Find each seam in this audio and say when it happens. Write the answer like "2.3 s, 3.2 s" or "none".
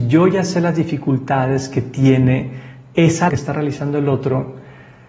3.3 s